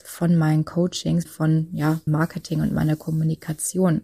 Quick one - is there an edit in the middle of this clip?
yes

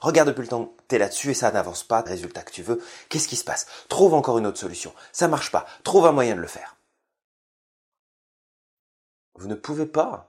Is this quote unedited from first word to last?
no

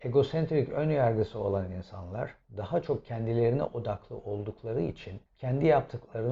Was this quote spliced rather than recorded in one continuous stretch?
yes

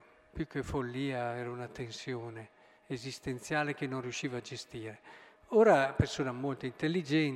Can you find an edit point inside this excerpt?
no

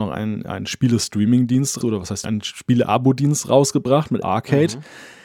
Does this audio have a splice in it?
yes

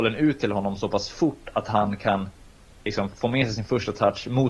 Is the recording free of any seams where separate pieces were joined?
yes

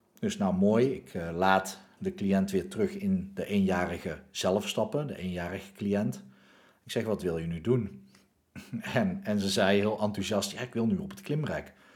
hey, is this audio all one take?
yes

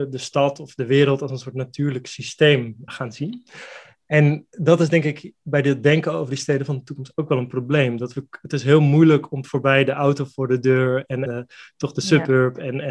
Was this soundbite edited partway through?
yes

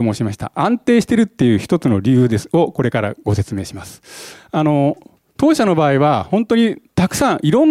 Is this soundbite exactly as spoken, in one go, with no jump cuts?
yes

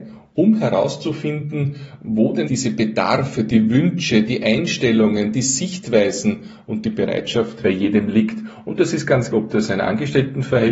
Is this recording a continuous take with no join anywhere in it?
no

